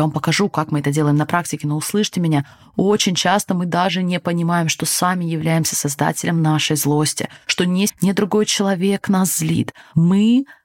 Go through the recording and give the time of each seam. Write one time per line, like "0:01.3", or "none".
0:07.9